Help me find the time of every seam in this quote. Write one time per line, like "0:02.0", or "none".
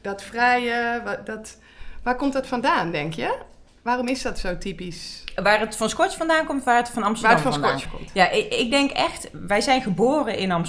0:07.9